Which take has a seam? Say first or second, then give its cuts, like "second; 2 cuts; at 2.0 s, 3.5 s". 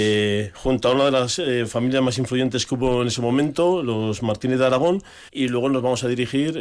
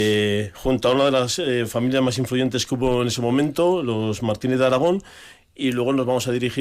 first; 1 cut; at 5.3 s